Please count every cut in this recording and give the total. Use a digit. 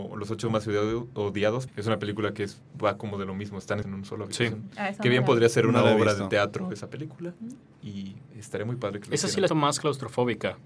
3